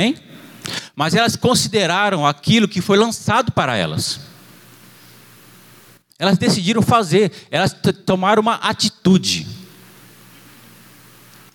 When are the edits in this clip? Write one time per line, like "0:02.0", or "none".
none